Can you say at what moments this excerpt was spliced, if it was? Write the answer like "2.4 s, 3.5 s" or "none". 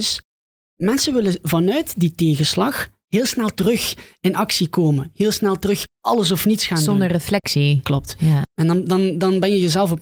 5.9 s